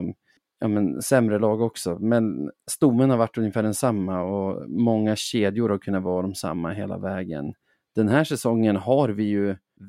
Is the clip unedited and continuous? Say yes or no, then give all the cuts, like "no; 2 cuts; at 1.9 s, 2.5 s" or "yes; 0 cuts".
yes; 0 cuts